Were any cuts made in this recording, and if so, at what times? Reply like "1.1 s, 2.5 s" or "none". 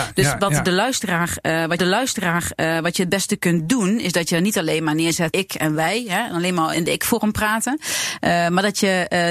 1.8 s, 5.3 s, 6.7 s